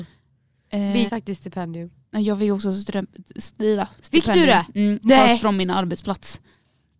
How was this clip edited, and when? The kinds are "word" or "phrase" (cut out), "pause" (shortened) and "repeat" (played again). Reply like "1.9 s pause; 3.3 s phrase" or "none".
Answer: 1.1 s phrase